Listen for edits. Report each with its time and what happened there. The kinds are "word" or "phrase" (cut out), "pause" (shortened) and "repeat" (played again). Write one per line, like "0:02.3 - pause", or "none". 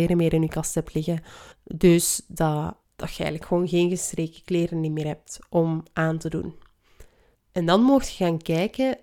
0:01.5 - pause
0:02.8 - pause
0:07.4 - pause